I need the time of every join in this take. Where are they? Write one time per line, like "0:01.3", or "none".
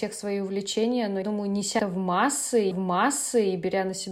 0:01.2
0:01.8
0:02.7